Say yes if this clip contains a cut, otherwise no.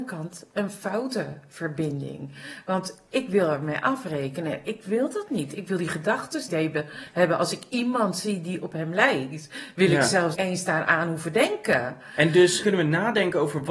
yes